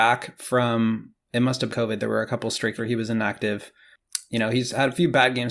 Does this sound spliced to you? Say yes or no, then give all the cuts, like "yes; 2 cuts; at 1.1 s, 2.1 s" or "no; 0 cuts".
yes; 2 cuts; at 1.7 s, 2.8 s